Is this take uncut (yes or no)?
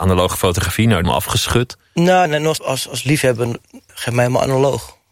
no